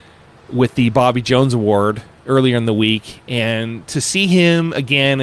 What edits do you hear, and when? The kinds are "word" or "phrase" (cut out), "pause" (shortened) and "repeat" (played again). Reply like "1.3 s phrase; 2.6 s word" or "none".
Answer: none